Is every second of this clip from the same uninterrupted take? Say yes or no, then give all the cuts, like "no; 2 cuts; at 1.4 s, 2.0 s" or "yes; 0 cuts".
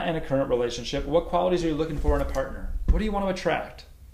yes; 0 cuts